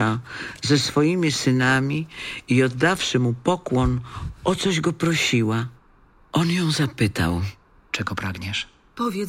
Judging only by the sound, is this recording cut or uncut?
uncut